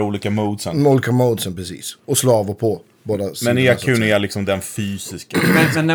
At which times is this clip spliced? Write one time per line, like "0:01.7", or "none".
0:02.0